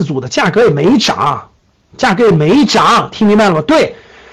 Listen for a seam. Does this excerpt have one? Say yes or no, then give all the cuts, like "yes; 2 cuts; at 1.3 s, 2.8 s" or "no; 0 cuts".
no; 0 cuts